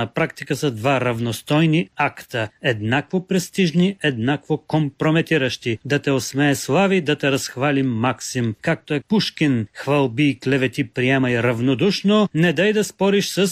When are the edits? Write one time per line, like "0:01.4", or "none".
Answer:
0:09.0